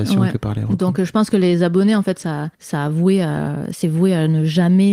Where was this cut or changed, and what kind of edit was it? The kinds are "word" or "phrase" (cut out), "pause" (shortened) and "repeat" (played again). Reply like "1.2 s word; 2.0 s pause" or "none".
2.5 s pause

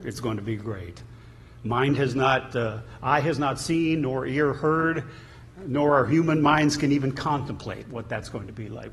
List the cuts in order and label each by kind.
none

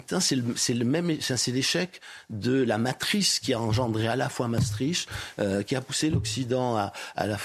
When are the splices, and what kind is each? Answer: none

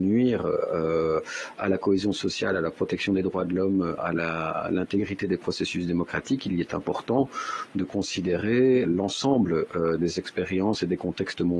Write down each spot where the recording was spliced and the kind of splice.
4.0 s word; 8.8 s word

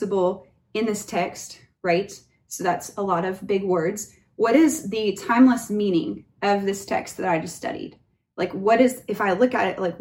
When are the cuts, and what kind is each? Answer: none

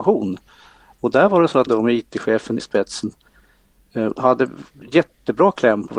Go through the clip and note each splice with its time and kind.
1.7 s word; 2.6 s word

